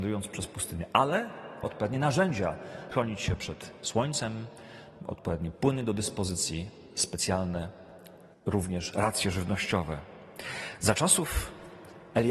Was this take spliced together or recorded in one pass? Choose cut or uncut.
cut